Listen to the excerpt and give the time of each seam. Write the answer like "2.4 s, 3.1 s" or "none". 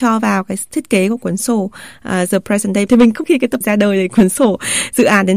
2.9 s, 3.2 s, 3.6 s